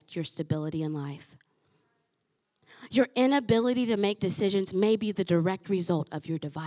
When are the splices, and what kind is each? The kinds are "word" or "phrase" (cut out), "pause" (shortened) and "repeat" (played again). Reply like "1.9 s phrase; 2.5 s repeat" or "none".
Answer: 4.2 s word